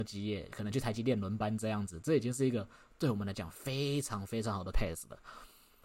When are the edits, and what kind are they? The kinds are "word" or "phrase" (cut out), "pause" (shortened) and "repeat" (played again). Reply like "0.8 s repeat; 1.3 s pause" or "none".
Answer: 4.7 s word